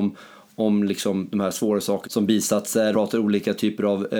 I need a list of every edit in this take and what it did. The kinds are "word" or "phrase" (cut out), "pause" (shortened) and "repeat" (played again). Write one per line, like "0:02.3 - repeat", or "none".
0:02.0 - word
0:02.9 - word